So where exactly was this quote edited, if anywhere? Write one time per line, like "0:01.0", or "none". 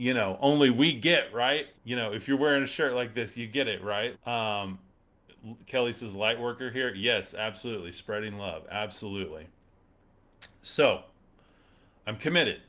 0:01.7
0:04.1